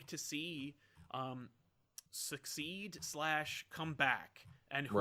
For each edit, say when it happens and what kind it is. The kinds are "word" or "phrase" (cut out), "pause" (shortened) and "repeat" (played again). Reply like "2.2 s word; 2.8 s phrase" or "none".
2.1 s pause